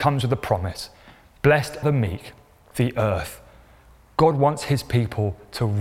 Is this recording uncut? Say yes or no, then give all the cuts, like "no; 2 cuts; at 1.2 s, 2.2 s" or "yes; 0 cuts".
no; 2 cuts; at 1.8 s, 2.7 s